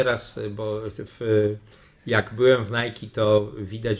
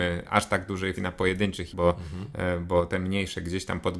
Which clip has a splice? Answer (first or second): second